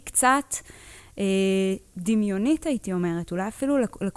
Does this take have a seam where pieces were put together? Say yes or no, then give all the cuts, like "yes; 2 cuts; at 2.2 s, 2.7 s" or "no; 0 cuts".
no; 0 cuts